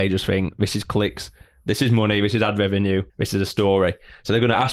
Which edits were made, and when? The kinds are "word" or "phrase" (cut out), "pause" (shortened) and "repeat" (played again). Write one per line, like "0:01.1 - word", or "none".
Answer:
0:03.1 - pause